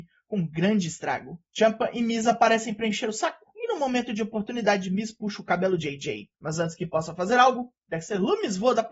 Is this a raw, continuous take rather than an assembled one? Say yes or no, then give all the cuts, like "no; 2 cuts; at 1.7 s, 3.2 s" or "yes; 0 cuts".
no; 2 cuts; at 1.5 s, 6.3 s